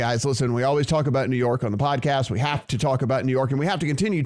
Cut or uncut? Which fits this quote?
uncut